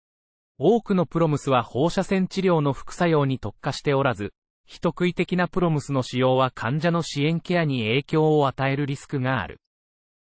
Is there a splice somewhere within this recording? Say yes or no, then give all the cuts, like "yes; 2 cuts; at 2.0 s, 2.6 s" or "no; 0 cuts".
no; 0 cuts